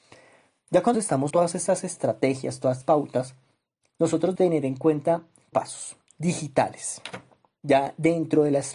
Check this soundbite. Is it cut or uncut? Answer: cut